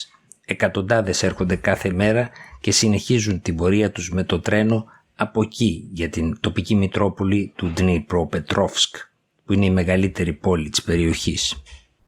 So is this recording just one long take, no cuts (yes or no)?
yes